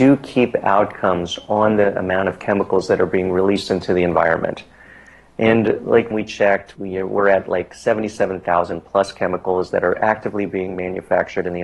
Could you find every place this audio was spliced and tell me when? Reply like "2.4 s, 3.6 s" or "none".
6.1 s, 6.8 s